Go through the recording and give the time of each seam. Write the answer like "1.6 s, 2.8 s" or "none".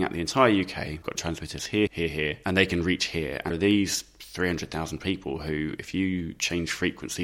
1.0 s, 1.9 s, 3.5 s